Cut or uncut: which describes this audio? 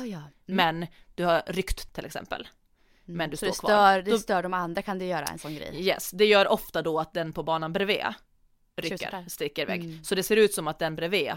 cut